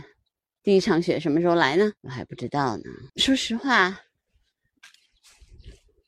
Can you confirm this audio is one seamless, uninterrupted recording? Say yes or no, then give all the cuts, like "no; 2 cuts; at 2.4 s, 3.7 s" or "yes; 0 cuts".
no; 2 cuts; at 2.0 s, 3.1 s